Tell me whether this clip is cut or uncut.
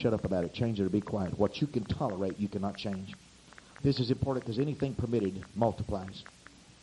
uncut